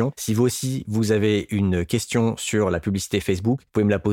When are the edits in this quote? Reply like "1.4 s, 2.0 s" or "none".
none

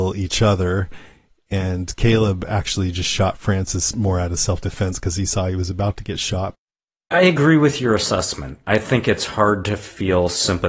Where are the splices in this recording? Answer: none

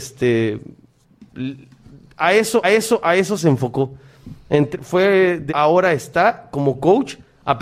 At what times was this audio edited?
2.6 s, 5.5 s

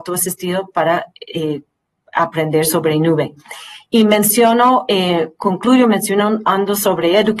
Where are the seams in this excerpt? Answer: none

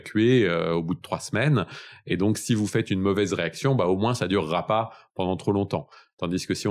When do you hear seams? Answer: none

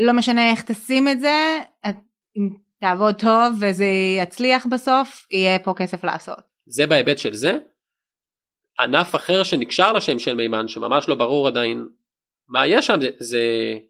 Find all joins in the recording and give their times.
none

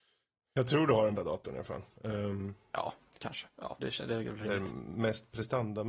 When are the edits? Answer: 1.2 s, 3.8 s

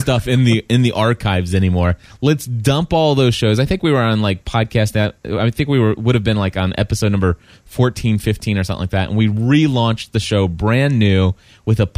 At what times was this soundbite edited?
none

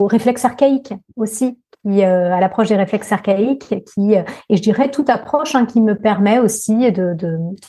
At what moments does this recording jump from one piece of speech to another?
none

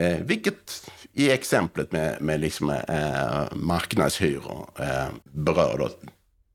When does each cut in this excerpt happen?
5.2 s

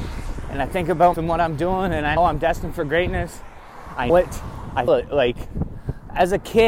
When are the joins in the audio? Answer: 1.1 s, 2.2 s, 4.1 s, 4.9 s

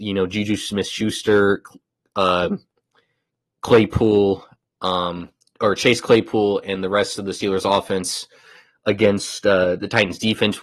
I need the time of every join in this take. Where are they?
none

